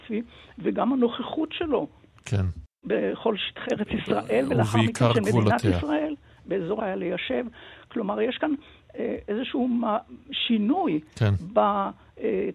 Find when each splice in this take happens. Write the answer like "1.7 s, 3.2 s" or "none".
6.8 s